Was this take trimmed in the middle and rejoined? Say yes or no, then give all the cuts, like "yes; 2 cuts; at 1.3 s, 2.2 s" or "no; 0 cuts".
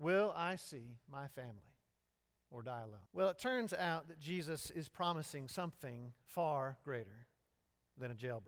yes; 2 cuts; at 2.0 s, 3.1 s